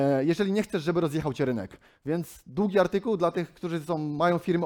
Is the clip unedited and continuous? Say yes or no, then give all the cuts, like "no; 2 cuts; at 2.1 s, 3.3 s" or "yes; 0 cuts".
yes; 0 cuts